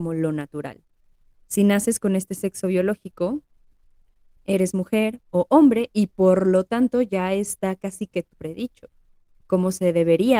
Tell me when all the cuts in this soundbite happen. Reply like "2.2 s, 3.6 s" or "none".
4.4 s, 8.3 s, 9.4 s